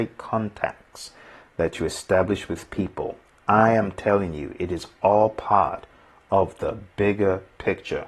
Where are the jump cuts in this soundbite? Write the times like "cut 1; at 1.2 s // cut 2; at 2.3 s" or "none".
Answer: none